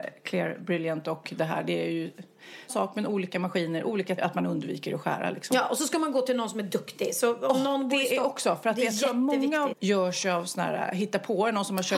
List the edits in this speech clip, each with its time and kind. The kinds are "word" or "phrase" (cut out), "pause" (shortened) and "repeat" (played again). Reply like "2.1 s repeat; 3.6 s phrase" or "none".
2.7 s word; 4.2 s word; 9.7 s word